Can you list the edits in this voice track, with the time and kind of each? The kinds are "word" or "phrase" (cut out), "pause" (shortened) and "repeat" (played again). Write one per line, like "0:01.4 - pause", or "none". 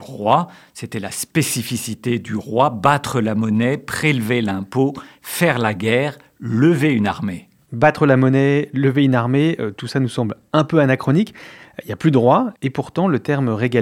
none

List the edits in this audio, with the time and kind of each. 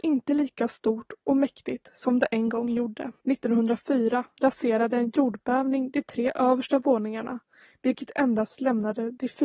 0:03.2 - pause

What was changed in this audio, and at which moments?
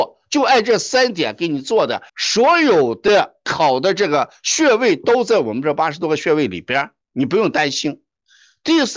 0:02.1 - pause
0:07.0 - pause

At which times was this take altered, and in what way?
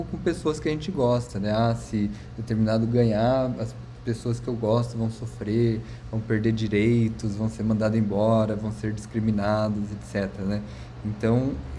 0:02.9 - word

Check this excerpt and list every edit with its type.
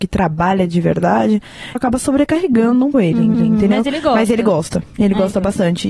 0:01.7 - word
0:02.9 - word
0:03.3 - repeat

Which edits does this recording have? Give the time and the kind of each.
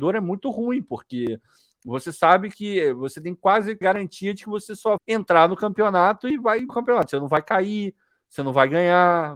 0:03.8 - word
0:05.0 - word
0:06.7 - word

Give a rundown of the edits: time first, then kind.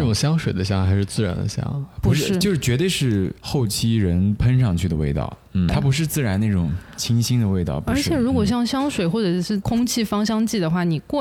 0:03.4 - pause
0:05.7 - word

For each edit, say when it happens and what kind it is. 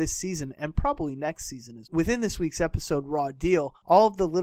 0:01.8 - word

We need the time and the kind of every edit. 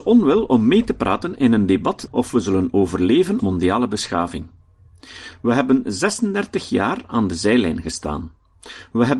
0:02.1 - phrase
0:03.4 - word

